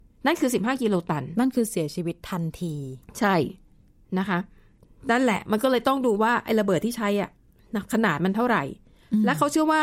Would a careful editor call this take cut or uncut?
cut